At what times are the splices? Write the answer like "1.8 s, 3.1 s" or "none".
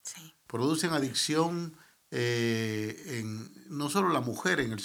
none

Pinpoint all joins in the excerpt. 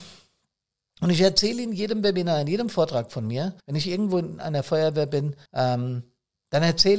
3.6 s, 5.5 s

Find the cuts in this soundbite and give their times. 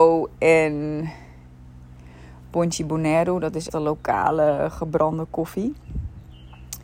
3.7 s

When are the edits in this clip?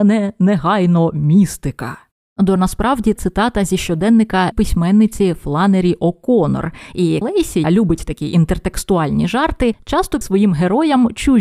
2.6 s, 3.2 s, 4.5 s, 7.2 s, 7.6 s, 10.2 s

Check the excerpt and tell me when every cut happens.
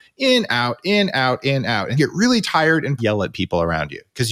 2.0 s, 3.0 s

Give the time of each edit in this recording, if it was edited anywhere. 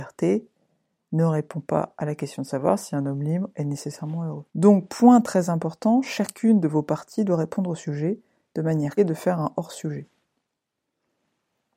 4.5 s, 9.0 s

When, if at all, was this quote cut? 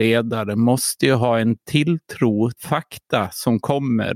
2.6 s

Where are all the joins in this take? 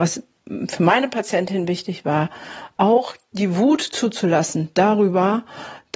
none

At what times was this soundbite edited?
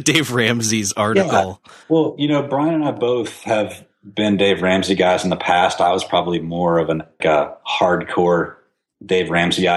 1.8 s, 7.2 s

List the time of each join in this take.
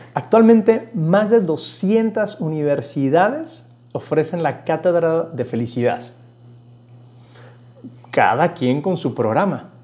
none

